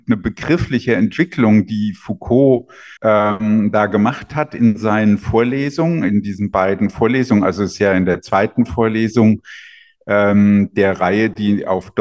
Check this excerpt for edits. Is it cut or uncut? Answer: cut